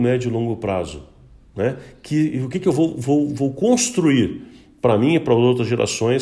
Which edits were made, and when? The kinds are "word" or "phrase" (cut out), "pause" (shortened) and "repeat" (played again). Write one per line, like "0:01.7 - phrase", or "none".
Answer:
none